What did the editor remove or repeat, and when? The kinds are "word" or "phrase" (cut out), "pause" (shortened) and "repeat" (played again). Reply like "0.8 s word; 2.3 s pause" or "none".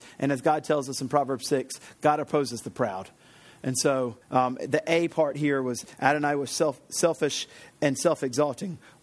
4.2 s pause